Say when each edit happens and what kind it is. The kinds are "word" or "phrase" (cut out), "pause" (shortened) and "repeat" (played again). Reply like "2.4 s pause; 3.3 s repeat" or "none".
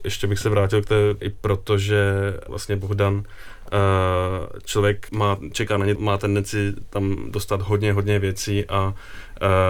1.2 s phrase; 2.5 s phrase; 5.1 s word; 6.0 s word